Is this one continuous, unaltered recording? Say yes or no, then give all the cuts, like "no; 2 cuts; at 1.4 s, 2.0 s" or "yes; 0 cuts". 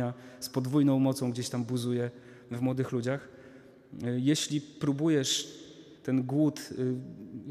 no; 1 cut; at 6.0 s